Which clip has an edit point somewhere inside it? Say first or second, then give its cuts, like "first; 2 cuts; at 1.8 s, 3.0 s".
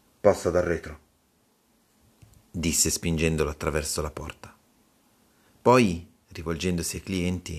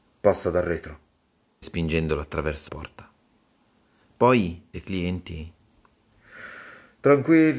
second; 3 cuts; at 1.6 s, 2.7 s, 4.7 s